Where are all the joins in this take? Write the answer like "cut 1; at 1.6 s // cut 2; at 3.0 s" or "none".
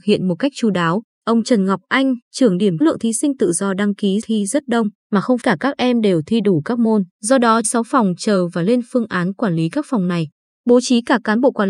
cut 1; at 1.1 s // cut 2; at 2.2 s // cut 3; at 2.8 s // cut 4; at 4.2 s // cut 5; at 5.0 s // cut 6; at 5.4 s // cut 7; at 7.1 s // cut 8; at 7.6 s